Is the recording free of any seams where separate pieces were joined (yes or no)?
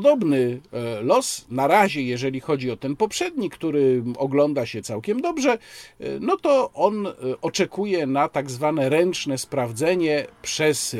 yes